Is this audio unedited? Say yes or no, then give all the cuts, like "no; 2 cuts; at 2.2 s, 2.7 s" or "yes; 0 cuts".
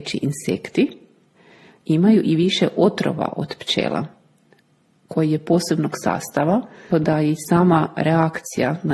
no; 1 cut; at 6.9 s